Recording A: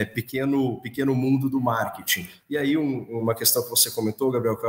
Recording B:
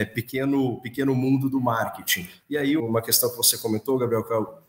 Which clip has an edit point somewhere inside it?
B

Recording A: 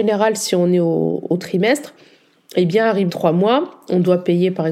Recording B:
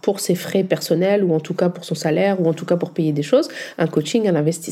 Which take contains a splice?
A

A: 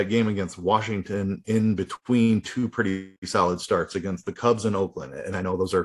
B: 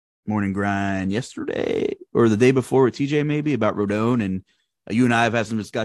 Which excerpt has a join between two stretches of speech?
A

